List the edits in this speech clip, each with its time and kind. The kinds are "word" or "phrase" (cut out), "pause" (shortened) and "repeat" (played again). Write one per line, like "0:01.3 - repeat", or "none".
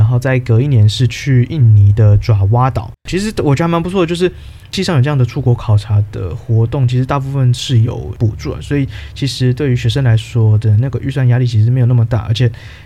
0:03.0 - pause